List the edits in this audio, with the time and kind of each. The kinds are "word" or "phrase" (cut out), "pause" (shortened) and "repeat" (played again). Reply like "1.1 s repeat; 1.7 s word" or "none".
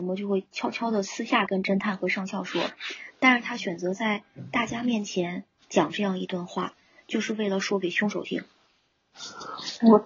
none